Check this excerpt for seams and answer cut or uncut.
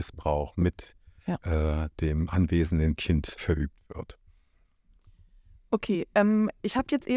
cut